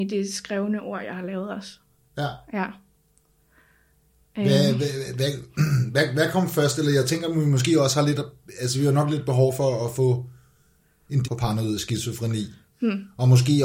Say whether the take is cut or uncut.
cut